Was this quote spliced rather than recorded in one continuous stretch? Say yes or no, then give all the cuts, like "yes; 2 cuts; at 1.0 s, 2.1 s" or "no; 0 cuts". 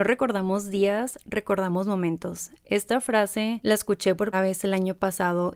yes; 1 cut; at 4.3 s